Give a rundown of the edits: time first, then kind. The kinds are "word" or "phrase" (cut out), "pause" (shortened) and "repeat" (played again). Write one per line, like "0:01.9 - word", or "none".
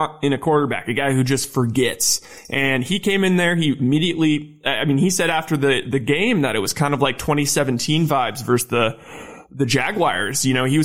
none